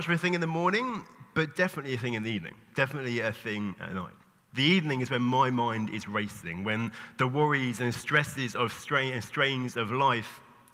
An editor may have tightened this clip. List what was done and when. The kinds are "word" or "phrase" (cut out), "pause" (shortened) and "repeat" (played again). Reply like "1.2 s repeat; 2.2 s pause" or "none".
none